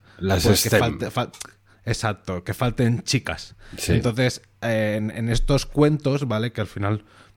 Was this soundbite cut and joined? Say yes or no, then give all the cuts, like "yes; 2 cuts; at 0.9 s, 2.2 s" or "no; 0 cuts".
no; 0 cuts